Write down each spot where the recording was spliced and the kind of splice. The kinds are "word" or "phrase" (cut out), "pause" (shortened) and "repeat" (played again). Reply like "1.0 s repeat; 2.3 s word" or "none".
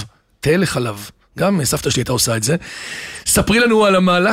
none